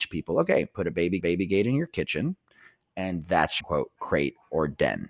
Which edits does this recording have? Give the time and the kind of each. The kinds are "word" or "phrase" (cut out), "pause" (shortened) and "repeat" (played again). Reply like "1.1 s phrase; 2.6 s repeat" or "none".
1.2 s repeat; 3.6 s phrase